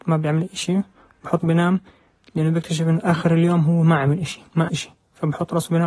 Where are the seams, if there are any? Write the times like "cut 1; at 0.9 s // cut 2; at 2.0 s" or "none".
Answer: cut 1; at 1.4 s // cut 2; at 4.7 s